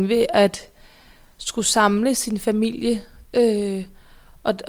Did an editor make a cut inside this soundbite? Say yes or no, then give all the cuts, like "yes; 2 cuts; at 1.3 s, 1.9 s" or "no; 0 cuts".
no; 0 cuts